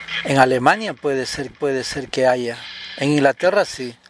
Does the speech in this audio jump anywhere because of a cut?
yes; 1 cut; at 1.5 s

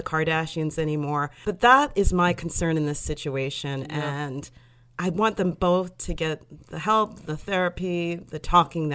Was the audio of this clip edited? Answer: no; 0 cuts

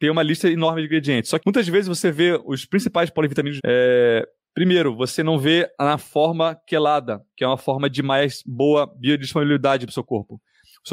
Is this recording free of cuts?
no; 2 cuts; at 1.4 s, 3.6 s

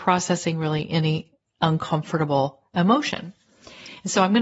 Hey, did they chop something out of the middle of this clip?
no; 0 cuts

